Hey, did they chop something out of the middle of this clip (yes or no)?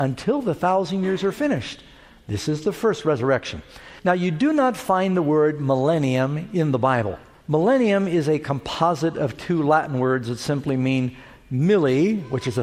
yes